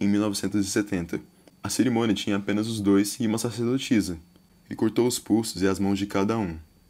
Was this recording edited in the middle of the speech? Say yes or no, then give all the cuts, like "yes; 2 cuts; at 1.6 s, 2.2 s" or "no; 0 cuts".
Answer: no; 0 cuts